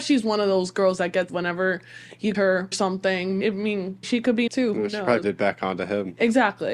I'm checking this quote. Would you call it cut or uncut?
cut